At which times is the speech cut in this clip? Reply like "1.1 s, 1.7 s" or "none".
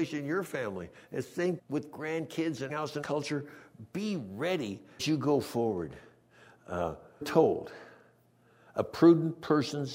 1.6 s, 2.7 s, 3.0 s, 5.0 s, 7.2 s